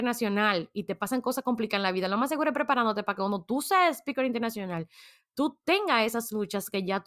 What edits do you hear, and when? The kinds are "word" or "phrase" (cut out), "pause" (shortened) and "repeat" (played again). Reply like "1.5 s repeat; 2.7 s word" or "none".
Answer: none